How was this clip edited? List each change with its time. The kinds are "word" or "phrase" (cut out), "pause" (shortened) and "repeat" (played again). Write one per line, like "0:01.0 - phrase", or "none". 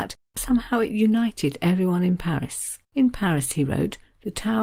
0:02.8 - pause